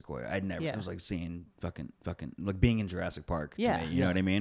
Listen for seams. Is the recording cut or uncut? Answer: cut